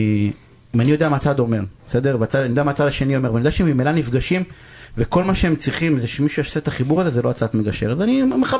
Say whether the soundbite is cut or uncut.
uncut